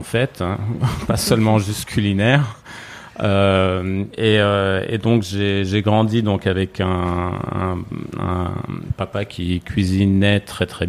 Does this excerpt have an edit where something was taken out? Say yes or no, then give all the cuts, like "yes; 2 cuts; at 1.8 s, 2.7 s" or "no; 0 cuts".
no; 0 cuts